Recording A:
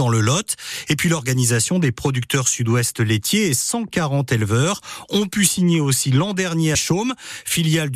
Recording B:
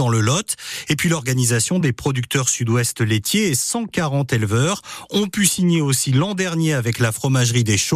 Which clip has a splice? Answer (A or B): A